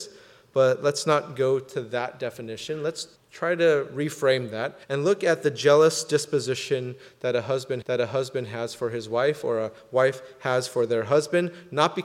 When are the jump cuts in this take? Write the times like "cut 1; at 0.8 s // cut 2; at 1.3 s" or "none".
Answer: cut 1; at 3.2 s // cut 2; at 4.8 s // cut 3; at 7.8 s